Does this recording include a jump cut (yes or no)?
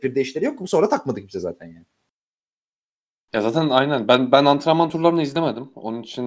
no